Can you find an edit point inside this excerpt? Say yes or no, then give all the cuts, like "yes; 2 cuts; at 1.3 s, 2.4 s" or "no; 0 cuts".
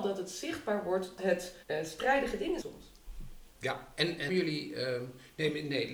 yes; 5 cuts; at 1.2 s, 1.6 s, 2.6 s, 3.5 s, 4.3 s